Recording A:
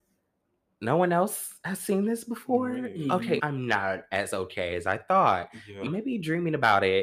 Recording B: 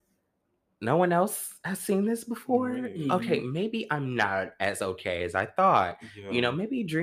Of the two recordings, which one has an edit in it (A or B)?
A